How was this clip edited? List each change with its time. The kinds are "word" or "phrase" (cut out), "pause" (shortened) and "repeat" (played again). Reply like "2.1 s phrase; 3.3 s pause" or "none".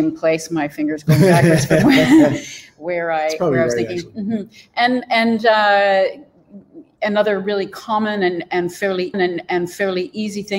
9.1 s repeat